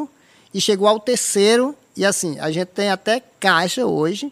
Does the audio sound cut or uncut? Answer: uncut